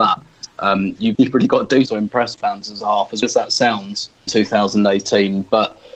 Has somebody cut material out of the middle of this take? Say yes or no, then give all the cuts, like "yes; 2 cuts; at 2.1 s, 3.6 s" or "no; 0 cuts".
yes; 6 cuts; at 1.1 s, 1.9 s, 2.3 s, 2.8 s, 3.2 s, 4.3 s